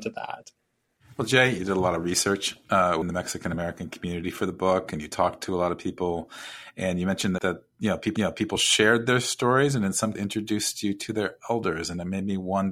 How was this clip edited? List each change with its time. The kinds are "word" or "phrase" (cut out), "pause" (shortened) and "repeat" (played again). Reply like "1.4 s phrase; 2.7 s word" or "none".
1.6 s phrase; 3.0 s word; 7.4 s word; 8.2 s repeat; 10.1 s word